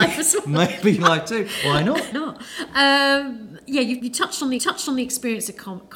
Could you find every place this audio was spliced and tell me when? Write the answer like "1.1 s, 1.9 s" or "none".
1.0 s, 2.1 s, 4.0 s, 4.6 s